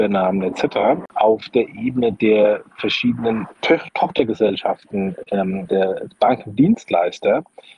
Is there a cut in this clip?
yes; 2 cuts; at 3.6 s, 5.7 s

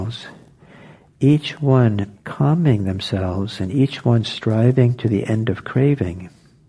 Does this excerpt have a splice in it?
yes; 1 cut; at 2.1 s

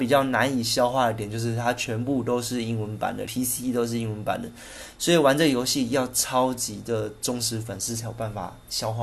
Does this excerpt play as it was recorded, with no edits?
no; 1 cut; at 3.3 s

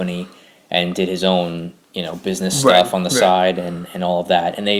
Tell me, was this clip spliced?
no; 0 cuts

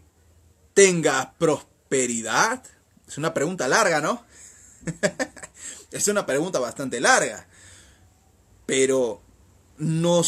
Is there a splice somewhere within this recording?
no; 0 cuts

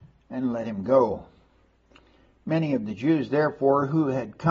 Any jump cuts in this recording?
no; 0 cuts

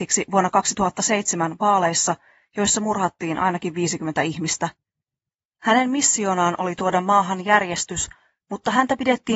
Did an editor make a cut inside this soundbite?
no; 0 cuts

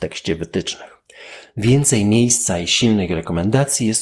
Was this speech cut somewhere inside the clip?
no; 0 cuts

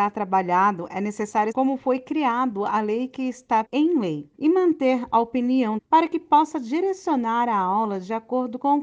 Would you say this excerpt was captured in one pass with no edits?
no; 4 cuts; at 1.5 s, 3.6 s, 4.3 s, 5.8 s

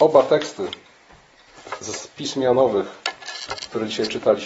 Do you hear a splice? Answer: no; 0 cuts

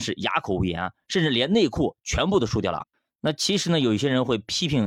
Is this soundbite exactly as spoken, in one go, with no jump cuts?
yes; 0 cuts

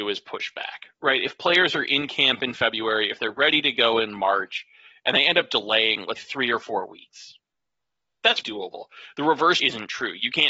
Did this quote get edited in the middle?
yes; 3 cuts; at 6.2 s, 8.4 s, 9.6 s

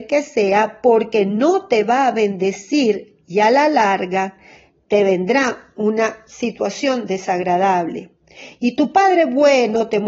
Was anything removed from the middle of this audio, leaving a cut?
no; 0 cuts

